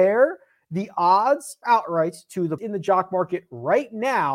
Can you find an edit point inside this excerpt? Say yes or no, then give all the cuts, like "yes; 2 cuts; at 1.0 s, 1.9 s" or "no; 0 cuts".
yes; 2 cuts; at 1.6 s, 2.6 s